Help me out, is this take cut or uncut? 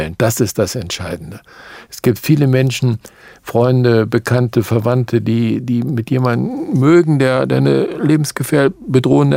uncut